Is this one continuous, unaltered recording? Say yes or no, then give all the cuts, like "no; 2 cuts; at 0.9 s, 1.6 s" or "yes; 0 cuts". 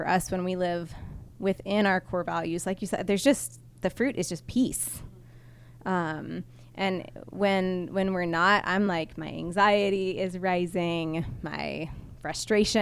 yes; 0 cuts